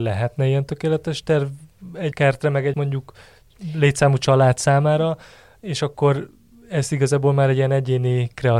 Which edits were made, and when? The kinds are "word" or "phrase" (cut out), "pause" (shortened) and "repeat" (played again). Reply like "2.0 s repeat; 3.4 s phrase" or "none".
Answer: 2.1 s word; 2.7 s word

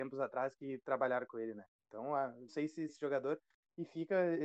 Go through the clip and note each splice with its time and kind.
2.5 s phrase; 2.9 s word

